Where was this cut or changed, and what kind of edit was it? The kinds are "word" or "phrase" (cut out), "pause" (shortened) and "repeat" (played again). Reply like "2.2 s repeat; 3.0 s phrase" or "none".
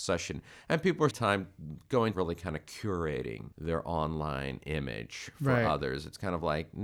1.1 s word; 2.1 s phrase; 3.5 s pause